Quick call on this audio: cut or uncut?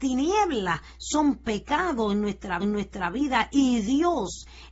cut